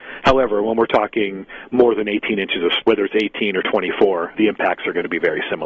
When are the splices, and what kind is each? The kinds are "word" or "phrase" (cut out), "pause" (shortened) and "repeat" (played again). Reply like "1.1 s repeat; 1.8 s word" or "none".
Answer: 2.8 s word; 4.3 s word